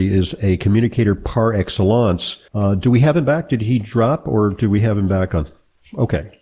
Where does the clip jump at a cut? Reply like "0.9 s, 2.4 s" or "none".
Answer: 2.5 s